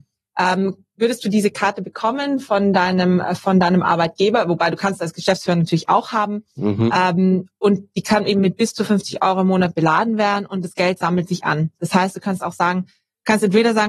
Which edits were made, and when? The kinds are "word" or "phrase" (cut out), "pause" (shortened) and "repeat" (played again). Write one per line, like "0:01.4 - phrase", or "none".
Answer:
none